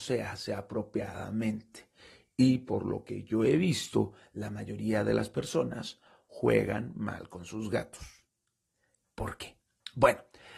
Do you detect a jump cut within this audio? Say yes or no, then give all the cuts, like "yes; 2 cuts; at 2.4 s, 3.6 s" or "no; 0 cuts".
no; 0 cuts